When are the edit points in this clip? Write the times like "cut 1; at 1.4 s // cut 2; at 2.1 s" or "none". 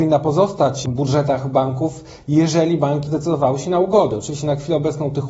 cut 1; at 3.1 s